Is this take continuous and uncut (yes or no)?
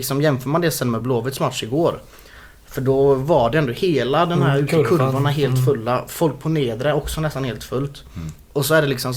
yes